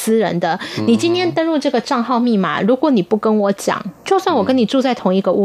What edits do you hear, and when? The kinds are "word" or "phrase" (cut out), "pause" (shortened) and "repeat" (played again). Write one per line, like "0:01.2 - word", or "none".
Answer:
0:04.0 - pause